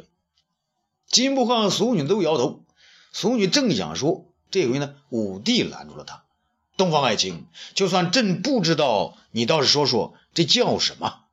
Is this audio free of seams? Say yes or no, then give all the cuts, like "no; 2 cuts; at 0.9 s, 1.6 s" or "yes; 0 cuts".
yes; 0 cuts